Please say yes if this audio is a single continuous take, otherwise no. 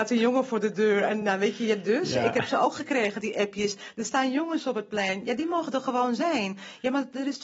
yes